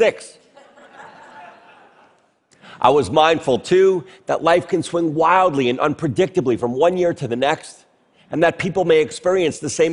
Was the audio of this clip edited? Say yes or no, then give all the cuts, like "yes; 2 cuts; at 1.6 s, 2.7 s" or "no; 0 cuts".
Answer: no; 0 cuts